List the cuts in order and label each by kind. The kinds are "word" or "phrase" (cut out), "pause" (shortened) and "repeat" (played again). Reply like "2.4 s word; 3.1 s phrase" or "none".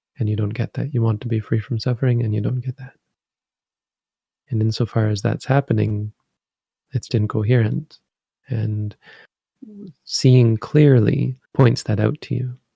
7.1 s word; 11.5 s pause